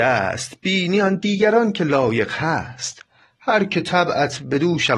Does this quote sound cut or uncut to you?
uncut